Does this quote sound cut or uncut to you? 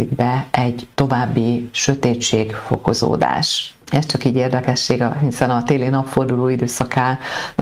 cut